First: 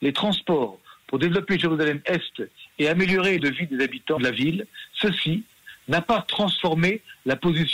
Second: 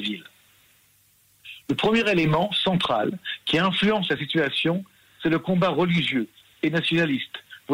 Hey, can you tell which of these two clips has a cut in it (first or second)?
first